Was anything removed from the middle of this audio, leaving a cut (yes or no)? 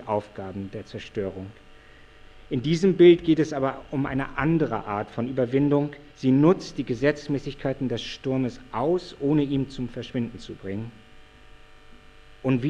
yes